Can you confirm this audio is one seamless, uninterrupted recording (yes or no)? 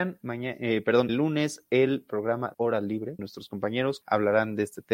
no